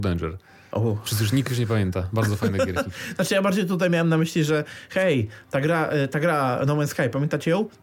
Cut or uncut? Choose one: uncut